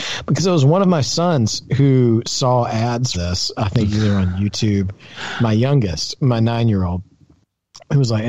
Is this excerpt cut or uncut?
cut